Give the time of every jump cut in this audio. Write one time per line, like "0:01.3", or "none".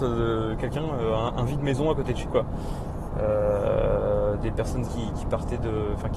0:02.3
0:04.9